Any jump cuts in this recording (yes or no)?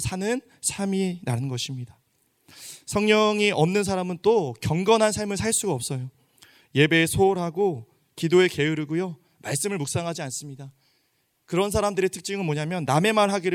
no